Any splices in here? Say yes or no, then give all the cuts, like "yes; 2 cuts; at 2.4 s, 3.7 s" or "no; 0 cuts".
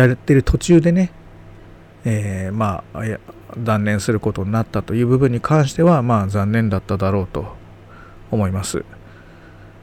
no; 0 cuts